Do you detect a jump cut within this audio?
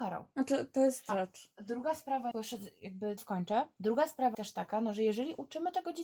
yes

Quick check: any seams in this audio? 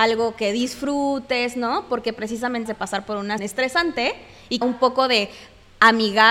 yes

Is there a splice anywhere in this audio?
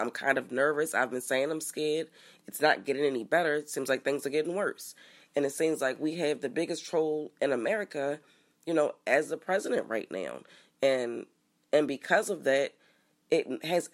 no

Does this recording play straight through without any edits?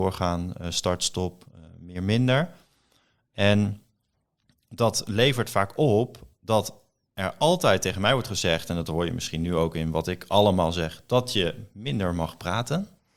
yes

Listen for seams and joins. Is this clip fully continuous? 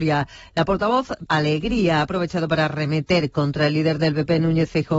no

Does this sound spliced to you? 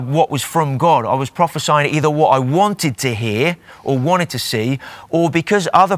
no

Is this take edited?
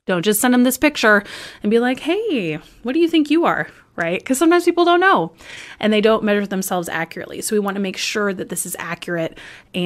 no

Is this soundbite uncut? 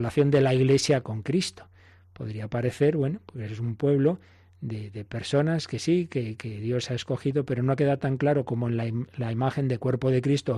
yes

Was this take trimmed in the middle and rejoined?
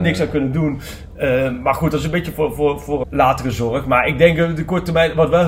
yes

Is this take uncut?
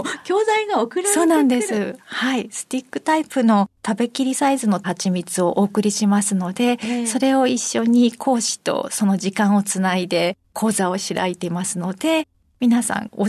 yes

